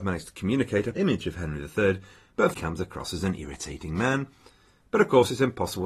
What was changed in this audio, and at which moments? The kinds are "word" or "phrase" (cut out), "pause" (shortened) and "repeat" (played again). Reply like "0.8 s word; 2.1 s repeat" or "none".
0.9 s word; 2.5 s phrase